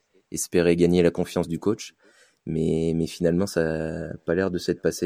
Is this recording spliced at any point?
no; 0 cuts

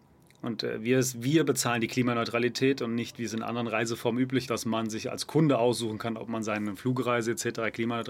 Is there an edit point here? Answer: yes; 1 cut; at 4.5 s

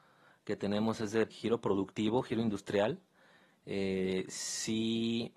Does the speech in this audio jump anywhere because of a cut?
yes; 1 cut; at 1.3 s

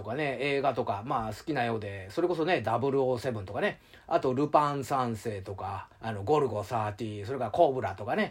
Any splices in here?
yes; 1 cut; at 5.9 s

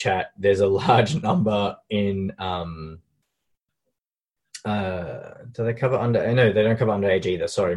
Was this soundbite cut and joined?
no; 0 cuts

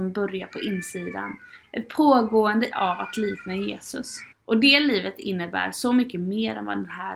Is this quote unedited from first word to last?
no; 2 cuts; at 2.7 s, 4.3 s

